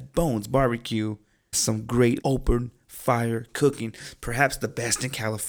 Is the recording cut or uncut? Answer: cut